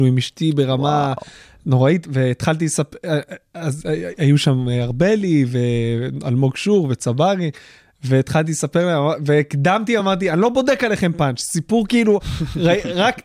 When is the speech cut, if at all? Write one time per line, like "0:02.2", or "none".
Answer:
none